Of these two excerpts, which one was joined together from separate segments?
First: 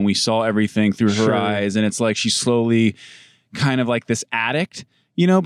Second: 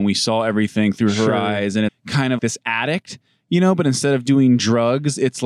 second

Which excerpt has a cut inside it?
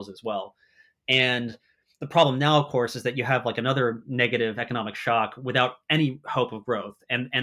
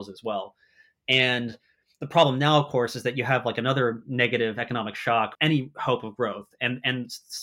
second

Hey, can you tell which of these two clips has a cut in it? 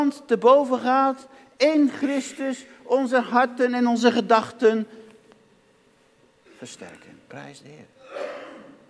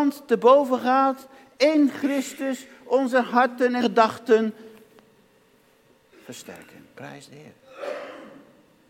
second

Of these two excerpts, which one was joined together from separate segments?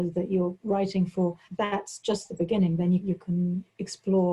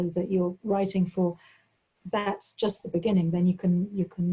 first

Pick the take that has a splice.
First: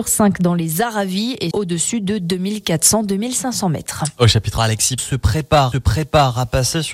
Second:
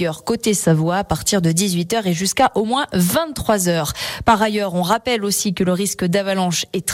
first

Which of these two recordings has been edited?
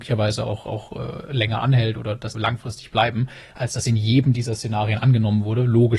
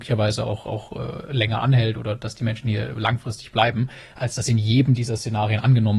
first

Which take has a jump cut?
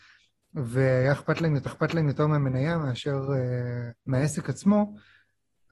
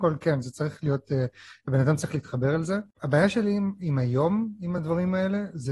first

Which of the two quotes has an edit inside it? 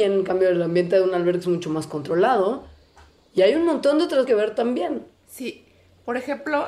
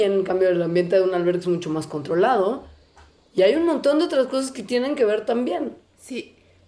first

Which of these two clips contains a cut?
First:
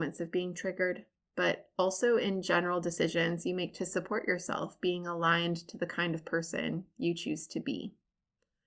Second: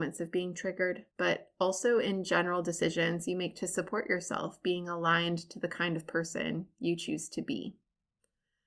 second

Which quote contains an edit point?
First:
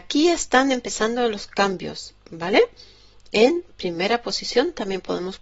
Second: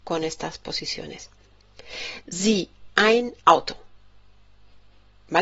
second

